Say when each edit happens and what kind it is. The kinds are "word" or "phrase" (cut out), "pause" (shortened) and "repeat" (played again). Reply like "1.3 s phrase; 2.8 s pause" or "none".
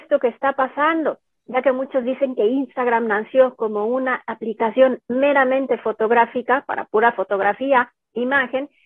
none